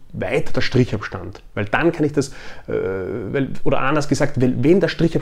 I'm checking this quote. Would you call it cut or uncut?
uncut